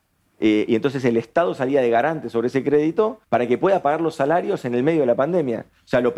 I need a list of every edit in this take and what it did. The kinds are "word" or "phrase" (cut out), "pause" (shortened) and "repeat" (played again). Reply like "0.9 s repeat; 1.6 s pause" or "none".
3.2 s pause